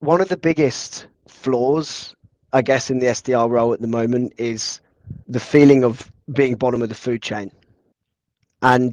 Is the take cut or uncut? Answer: cut